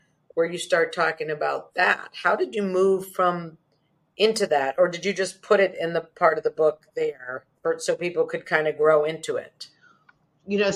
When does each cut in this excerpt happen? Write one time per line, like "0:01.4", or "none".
0:07.5